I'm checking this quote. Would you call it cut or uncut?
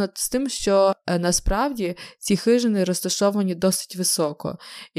uncut